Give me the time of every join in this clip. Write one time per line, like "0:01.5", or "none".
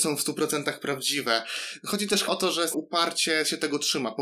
0:02.3
0:02.7